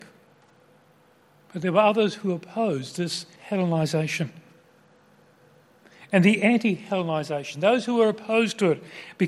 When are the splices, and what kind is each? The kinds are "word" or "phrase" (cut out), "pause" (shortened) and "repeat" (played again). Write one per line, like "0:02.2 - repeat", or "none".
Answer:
0:03.4 - pause